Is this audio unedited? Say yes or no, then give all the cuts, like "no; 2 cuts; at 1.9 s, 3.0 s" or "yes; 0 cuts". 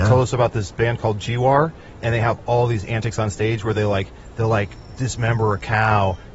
yes; 0 cuts